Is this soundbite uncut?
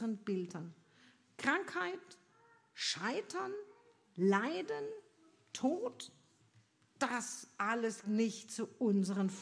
no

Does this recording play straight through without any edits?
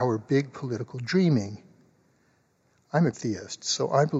no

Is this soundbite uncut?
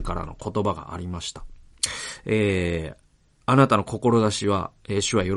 yes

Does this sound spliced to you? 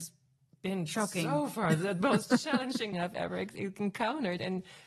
yes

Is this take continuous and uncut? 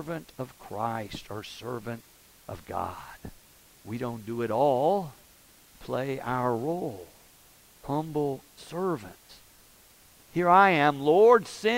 no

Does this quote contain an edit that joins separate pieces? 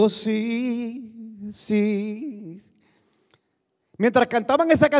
no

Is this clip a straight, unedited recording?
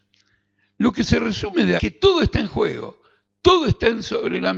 no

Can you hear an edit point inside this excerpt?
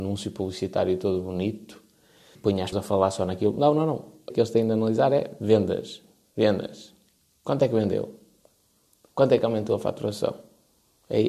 yes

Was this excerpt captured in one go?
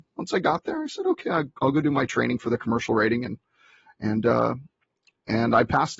yes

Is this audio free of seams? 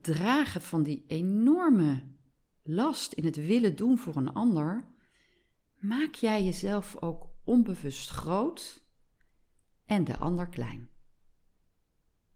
yes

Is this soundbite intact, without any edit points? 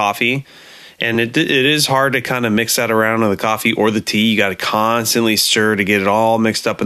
yes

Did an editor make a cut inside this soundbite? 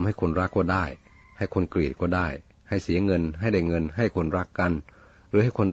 no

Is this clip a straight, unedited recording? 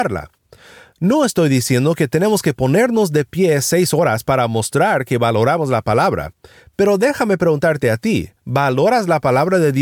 no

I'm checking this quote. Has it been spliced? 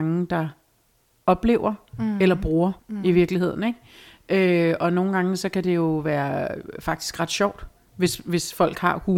yes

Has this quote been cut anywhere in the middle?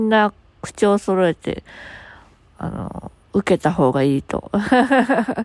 yes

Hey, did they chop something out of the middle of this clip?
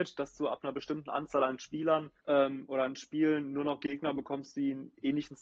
yes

